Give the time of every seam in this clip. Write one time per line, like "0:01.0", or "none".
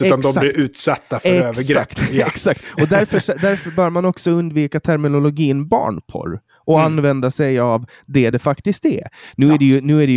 none